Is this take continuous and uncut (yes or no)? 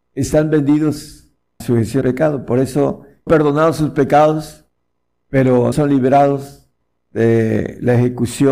no